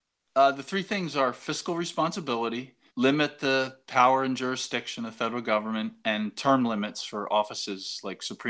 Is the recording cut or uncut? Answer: cut